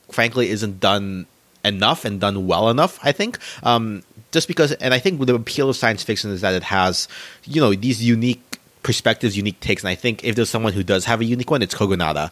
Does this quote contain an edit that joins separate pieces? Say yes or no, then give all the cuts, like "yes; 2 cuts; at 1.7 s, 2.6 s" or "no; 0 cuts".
no; 0 cuts